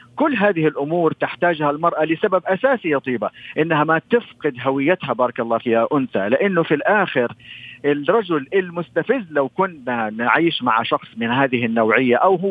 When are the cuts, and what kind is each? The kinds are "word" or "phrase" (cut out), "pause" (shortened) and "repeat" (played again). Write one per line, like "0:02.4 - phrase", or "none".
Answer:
0:05.6 - word

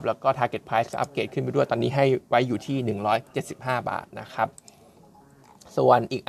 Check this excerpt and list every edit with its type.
none

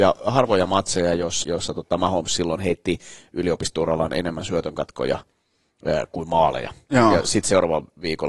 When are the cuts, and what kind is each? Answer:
0:01.4 - word

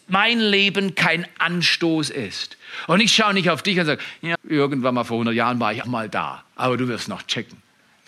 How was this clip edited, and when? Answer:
0:04.3 - word
0:05.8 - word
0:06.5 - pause

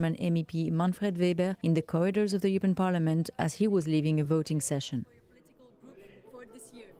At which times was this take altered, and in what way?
none

